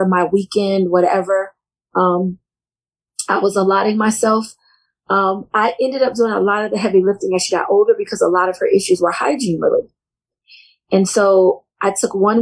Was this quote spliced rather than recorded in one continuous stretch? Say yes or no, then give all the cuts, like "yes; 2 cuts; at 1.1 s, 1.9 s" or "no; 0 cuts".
no; 0 cuts